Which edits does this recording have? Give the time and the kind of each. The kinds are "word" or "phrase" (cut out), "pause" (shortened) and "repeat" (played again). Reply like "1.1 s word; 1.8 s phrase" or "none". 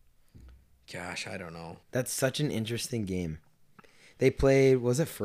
1.8 s pause